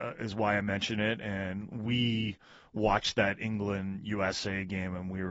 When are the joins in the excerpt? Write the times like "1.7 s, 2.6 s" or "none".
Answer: none